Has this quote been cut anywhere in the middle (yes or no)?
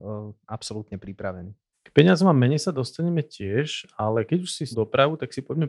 yes